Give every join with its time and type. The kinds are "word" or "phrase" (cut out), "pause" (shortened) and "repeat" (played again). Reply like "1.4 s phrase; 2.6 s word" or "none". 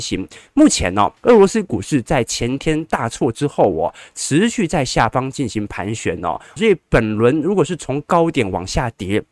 1.2 s pause; 6.6 s word